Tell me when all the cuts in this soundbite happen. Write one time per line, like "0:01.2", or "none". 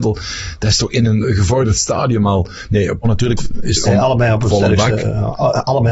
0:01.2
0:03.0
0:03.4
0:03.8